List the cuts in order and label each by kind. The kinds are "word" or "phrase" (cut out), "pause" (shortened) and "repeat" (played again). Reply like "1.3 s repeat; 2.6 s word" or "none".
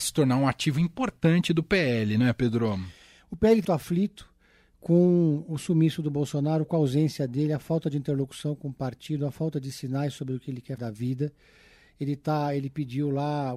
3.6 s word; 10.8 s word